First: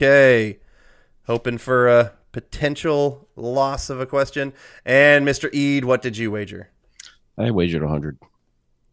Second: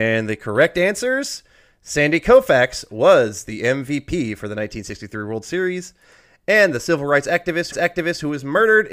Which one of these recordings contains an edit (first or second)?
second